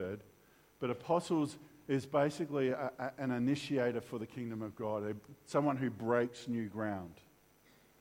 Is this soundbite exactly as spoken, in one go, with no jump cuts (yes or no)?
yes